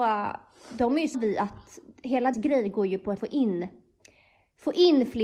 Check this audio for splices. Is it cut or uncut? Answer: cut